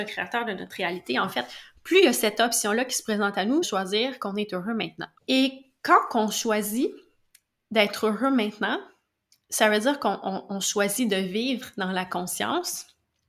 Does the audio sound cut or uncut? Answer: cut